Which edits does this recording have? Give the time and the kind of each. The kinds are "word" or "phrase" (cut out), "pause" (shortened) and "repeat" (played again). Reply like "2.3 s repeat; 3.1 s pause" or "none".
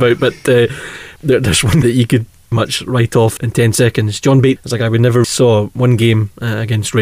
1.2 s word; 1.8 s word; 2.5 s word; 3.4 s word; 4.6 s word; 5.2 s word